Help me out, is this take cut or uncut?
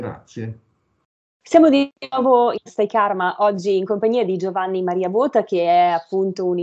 cut